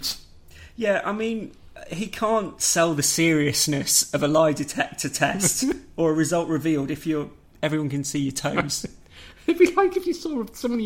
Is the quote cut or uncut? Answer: uncut